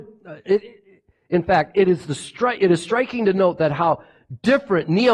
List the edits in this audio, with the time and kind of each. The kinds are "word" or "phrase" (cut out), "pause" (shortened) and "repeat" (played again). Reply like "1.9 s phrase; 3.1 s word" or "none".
none